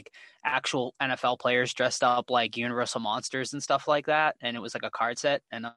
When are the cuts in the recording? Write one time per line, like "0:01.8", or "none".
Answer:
none